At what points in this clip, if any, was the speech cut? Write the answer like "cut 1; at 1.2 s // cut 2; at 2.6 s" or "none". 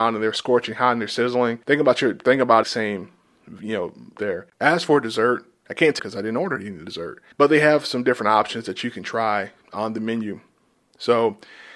cut 1; at 1.6 s // cut 2; at 2.6 s // cut 3; at 4.2 s // cut 4; at 6.0 s // cut 5; at 7.3 s // cut 6; at 9.6 s